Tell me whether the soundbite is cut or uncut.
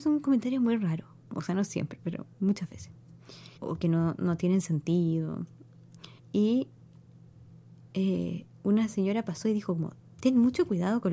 cut